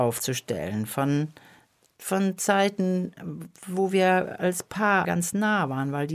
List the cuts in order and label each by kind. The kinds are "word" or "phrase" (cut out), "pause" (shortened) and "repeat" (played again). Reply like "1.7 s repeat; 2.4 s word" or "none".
5.0 s word